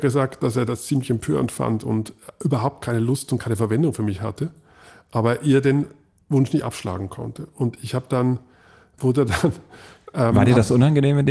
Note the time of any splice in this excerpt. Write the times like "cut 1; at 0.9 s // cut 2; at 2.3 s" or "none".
cut 1; at 9.0 s